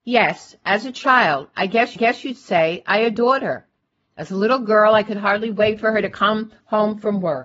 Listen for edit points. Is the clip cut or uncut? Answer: cut